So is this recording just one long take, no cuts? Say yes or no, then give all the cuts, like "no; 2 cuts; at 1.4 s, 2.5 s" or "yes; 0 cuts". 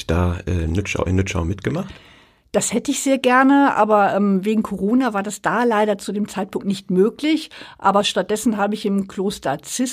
yes; 0 cuts